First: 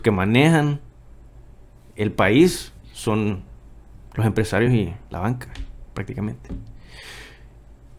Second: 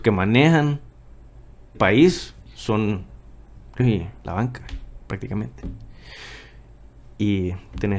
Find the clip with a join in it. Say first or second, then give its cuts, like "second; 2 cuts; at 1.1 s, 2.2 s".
second; 2 cuts; at 1.7 s, 3.8 s